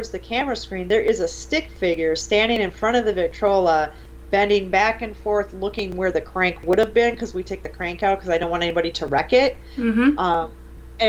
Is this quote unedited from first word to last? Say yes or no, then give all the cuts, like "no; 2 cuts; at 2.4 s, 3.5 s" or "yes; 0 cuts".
yes; 0 cuts